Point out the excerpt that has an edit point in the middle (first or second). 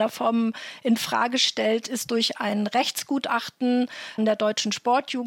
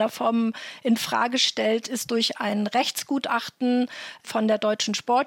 first